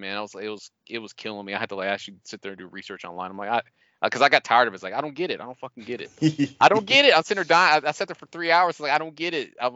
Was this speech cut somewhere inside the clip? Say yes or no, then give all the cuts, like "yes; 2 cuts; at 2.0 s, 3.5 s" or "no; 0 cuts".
no; 0 cuts